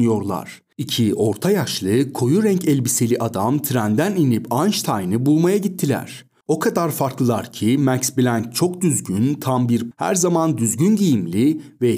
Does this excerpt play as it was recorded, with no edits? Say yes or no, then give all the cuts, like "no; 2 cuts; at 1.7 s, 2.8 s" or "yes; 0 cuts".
no; 1 cut; at 9.9 s